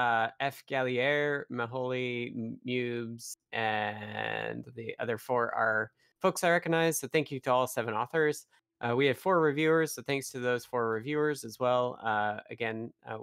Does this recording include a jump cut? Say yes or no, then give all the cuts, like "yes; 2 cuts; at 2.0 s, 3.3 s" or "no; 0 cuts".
no; 0 cuts